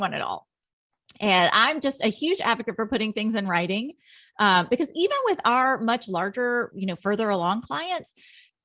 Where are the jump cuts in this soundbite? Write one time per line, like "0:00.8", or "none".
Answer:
none